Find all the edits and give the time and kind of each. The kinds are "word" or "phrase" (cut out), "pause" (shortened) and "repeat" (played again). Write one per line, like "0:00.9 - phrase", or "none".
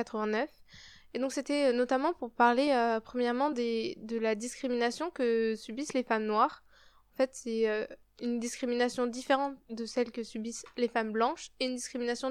none